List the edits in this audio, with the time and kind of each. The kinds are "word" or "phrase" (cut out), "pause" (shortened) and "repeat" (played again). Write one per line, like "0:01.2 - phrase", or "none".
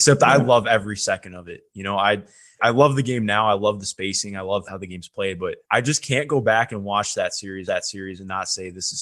0:02.6 - word
0:04.6 - word
0:05.6 - pause
0:07.7 - repeat